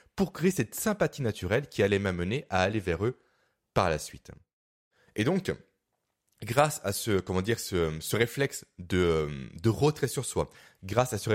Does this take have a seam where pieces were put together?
no; 0 cuts

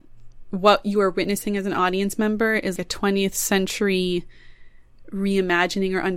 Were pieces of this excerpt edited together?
no; 0 cuts

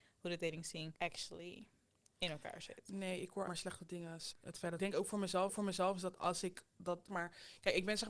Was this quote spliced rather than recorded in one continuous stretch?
yes; 6 cuts; at 1.0 s, 3.5 s, 4.3 s, 4.8 s, 5.5 s, 7.1 s

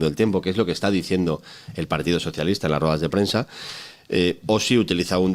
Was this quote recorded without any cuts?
yes; 0 cuts

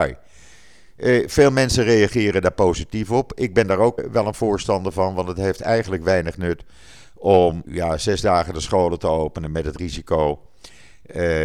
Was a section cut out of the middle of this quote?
yes; 2 cuts; at 4.0 s, 7.6 s

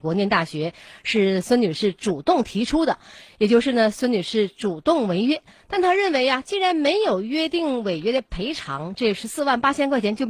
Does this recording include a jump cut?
no; 0 cuts

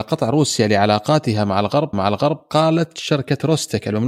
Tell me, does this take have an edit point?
yes; 1 cut; at 1.9 s

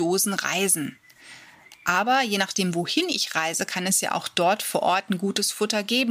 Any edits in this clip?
no; 0 cuts

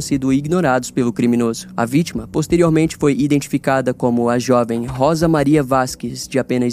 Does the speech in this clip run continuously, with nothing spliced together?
yes; 0 cuts

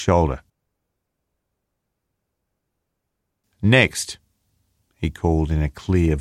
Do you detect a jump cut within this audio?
no; 0 cuts

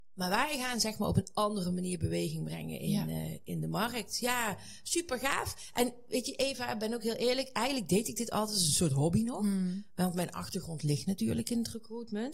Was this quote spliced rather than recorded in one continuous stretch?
no; 0 cuts

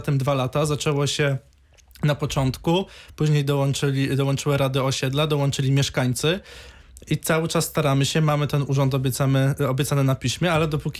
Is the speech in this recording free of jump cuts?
yes; 0 cuts

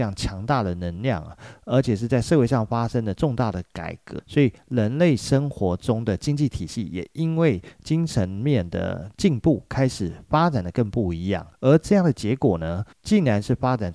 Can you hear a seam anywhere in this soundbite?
yes; 3 cuts; at 4.2 s, 11.5 s, 12.9 s

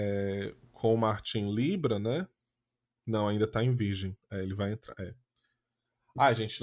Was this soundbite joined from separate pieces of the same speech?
no; 0 cuts

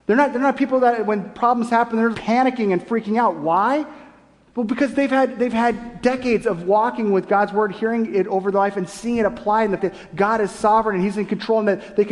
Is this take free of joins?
no; 2 cuts; at 2.1 s, 9.8 s

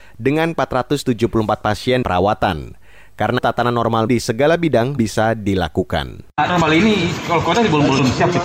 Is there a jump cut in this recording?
yes; 5 cuts; at 2.0 s, 3.4 s, 4.1 s, 5.0 s, 6.5 s

